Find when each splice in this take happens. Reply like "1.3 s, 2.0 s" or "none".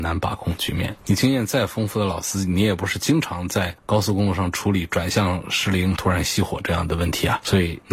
6.0 s